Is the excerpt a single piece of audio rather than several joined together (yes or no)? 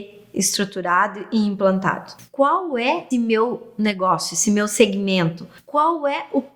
no